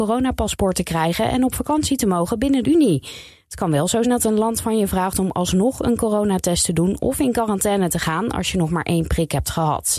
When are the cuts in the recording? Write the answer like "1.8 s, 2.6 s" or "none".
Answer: 2.6 s, 4.0 s